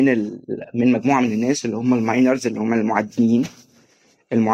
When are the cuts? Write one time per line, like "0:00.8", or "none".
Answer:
none